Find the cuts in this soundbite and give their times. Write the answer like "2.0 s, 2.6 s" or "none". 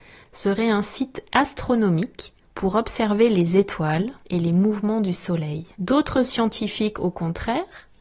2.4 s, 4.2 s, 5.7 s